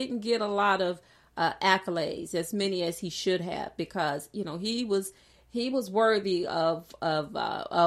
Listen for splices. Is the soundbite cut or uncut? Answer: uncut